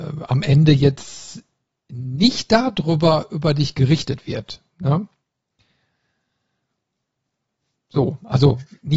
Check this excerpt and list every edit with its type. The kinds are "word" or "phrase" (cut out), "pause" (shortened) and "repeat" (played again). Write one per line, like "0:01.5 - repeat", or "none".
none

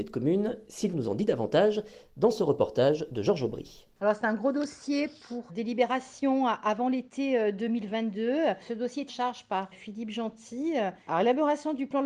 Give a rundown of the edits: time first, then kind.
0:00.9 - word
0:05.5 - word
0:09.1 - word
0:09.7 - word

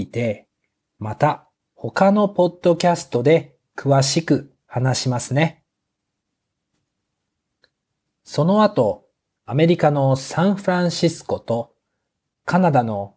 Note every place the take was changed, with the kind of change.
none

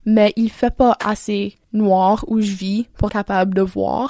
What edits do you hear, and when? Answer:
0:01.6 - pause
0:03.1 - word

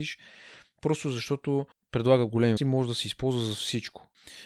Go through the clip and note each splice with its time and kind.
0:01.7 - pause
0:02.6 - word

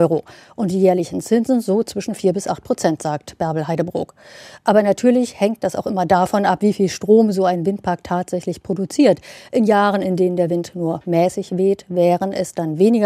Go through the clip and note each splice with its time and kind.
none

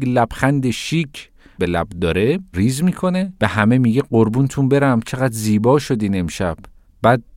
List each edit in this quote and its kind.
0:01.6 - phrase
0:02.5 - word
0:03.4 - pause

